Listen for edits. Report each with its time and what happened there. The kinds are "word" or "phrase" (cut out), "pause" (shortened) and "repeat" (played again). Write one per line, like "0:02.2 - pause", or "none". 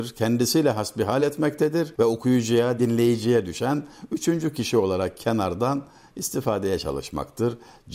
none